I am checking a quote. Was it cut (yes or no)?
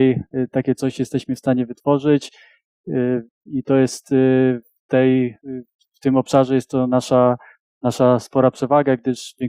no